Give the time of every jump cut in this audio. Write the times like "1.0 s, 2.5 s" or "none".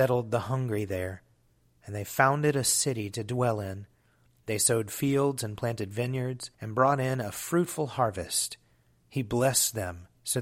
6.5 s